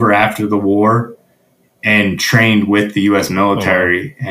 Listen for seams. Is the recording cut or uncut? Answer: uncut